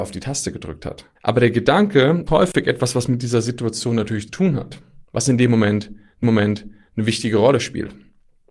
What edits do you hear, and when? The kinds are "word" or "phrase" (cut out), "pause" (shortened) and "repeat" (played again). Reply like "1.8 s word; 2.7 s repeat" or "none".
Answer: 1.2 s pause; 2.3 s word; 4.3 s word; 5.0 s pause; 6.2 s repeat